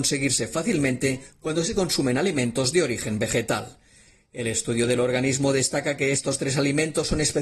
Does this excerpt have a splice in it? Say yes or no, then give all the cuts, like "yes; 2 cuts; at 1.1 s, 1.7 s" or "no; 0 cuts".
no; 0 cuts